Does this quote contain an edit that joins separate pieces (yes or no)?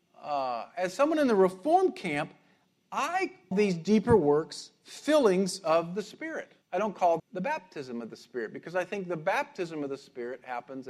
yes